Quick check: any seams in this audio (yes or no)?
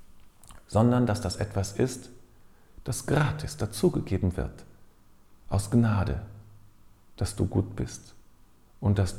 no